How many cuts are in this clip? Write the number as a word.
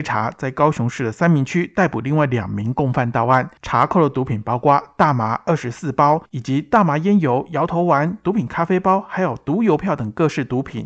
two